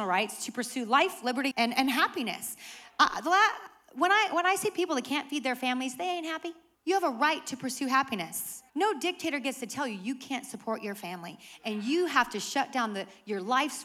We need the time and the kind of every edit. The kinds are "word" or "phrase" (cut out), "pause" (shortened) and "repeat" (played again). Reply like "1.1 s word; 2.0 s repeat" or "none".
1.5 s word; 6.7 s pause; 8.7 s pause